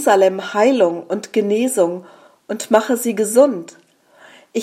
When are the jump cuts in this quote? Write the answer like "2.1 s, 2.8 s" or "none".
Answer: none